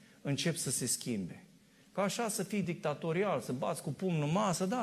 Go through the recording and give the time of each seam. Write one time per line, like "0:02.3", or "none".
none